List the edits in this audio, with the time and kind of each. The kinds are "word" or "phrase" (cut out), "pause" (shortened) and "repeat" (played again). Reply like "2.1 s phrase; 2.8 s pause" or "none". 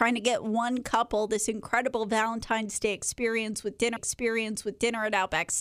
4.0 s repeat